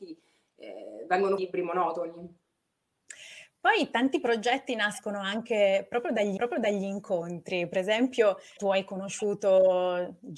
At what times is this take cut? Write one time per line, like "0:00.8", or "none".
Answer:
0:01.4
0:06.4
0:08.6